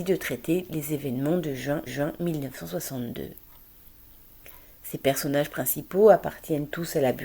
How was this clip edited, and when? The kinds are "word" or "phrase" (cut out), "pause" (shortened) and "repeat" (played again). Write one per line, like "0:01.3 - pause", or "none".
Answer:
0:01.9 - repeat